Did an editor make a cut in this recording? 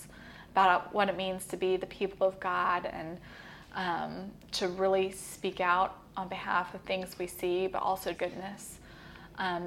yes; 1 cut; at 8.1 s

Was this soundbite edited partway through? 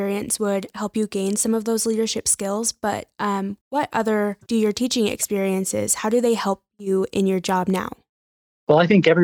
yes; 2 cuts; at 3.6 s, 4.4 s

